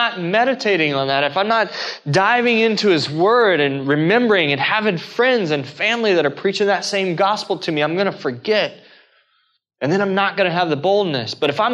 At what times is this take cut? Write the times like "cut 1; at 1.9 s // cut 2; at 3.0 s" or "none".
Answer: none